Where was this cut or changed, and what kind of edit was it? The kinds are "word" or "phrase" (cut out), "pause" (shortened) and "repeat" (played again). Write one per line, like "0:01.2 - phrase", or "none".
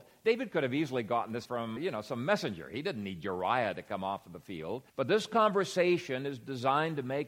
0:01.4 - word
0:01.8 - word
0:04.9 - pause